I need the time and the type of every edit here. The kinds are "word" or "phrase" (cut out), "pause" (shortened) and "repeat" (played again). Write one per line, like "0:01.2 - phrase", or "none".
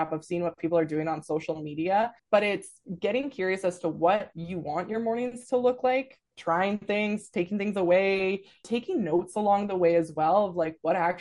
0:02.2 - pause
0:06.3 - pause